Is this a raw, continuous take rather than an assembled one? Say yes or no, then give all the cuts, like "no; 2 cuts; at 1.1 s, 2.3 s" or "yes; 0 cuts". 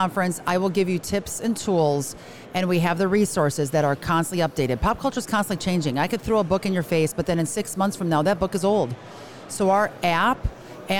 yes; 0 cuts